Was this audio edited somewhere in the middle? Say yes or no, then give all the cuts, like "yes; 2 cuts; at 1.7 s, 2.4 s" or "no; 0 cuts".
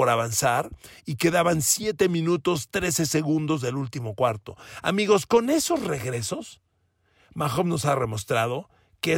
no; 0 cuts